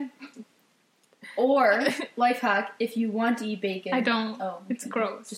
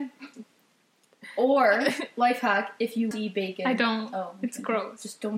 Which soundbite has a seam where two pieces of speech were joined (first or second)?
second